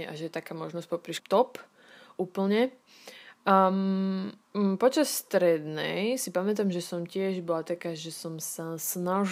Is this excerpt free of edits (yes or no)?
no